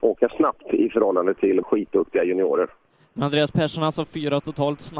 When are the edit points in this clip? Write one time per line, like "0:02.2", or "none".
0:01.6